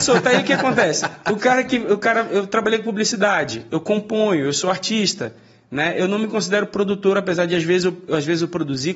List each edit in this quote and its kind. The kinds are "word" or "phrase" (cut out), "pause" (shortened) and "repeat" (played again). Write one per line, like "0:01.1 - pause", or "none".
none